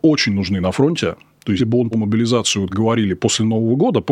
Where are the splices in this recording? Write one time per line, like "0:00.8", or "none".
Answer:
0:01.6
0:01.9
0:02.7